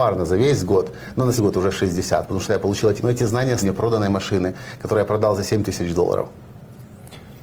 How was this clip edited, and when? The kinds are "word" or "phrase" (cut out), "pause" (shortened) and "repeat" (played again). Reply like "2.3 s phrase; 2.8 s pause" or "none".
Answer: 1.4 s word; 3.0 s word; 3.6 s word